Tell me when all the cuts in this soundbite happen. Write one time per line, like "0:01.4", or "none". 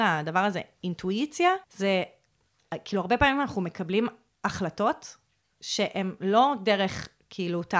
0:01.6